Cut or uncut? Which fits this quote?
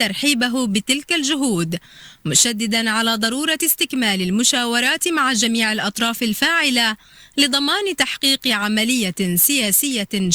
uncut